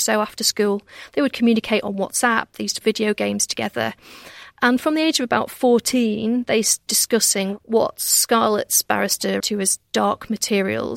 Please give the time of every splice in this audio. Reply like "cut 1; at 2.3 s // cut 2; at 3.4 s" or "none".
cut 1; at 2.8 s // cut 2; at 6.9 s // cut 3; at 9.4 s